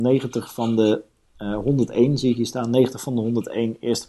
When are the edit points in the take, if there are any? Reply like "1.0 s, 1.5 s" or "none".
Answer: none